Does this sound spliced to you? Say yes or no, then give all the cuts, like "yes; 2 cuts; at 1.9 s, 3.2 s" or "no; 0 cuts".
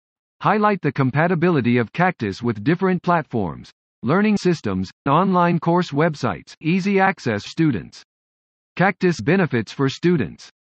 yes; 6 cuts; at 3.0 s, 4.4 s, 5.1 s, 6.6 s, 7.5 s, 9.2 s